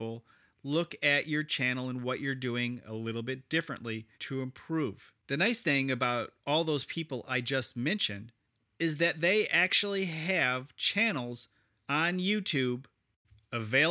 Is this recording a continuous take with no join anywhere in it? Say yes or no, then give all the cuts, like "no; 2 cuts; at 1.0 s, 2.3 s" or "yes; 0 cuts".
no; 5 cuts; at 4.1 s, 5.2 s, 6.4 s, 8.4 s, 11.8 s